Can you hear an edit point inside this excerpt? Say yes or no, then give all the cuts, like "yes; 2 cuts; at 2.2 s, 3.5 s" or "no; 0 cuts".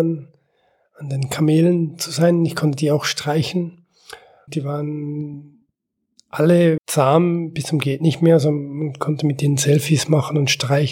yes; 2 cuts; at 4.5 s, 6.8 s